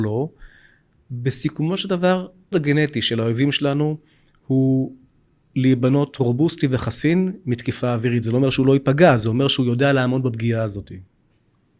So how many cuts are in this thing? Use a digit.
1